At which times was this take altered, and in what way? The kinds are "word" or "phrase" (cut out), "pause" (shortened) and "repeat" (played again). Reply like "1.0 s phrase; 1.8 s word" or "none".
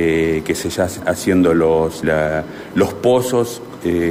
1.0 s word; 2.0 s word